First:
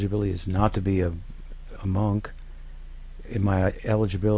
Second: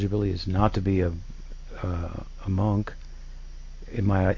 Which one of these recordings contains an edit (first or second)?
first